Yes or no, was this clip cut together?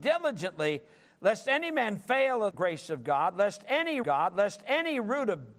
yes